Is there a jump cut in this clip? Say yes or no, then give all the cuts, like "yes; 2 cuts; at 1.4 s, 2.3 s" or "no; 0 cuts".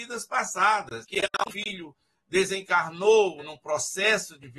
yes; 3 cuts; at 1.0 s, 1.4 s, 3.4 s